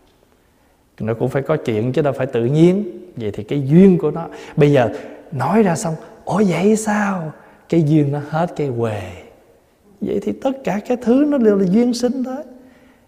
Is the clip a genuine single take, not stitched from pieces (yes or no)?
yes